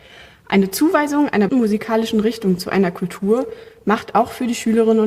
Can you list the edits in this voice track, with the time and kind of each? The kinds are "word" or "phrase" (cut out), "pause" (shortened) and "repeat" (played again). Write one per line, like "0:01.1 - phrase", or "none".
0:01.5 - word